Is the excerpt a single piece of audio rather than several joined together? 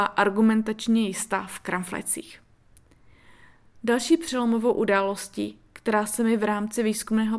yes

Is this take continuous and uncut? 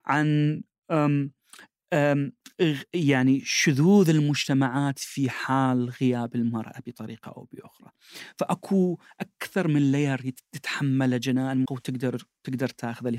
no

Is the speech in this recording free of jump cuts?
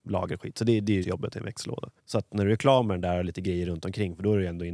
no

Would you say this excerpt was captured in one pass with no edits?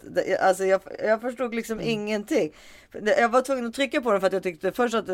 yes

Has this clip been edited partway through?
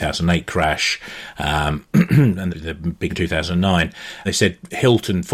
yes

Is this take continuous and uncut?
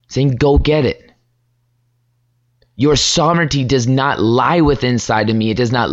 yes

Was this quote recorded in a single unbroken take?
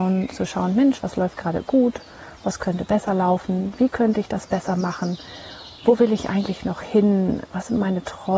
yes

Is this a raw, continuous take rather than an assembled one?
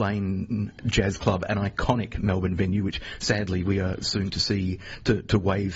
yes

